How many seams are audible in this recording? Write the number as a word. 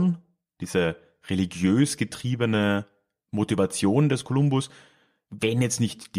zero